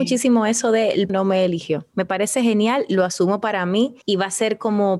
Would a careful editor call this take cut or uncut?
cut